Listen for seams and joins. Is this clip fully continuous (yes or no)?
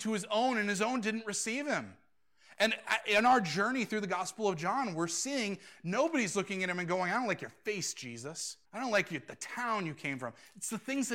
no